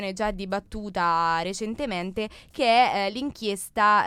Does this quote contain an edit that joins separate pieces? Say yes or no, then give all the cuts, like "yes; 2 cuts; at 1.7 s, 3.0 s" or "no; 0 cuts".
no; 0 cuts